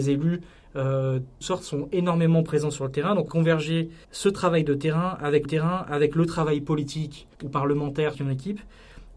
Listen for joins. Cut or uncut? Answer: cut